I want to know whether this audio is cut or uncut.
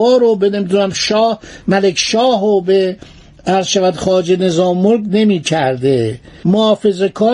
uncut